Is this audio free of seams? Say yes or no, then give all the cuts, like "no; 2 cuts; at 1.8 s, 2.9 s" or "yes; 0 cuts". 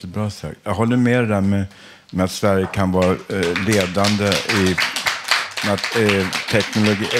yes; 0 cuts